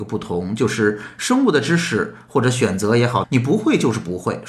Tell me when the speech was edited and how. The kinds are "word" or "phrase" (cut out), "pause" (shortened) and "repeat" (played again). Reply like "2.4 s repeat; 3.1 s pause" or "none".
3.2 s phrase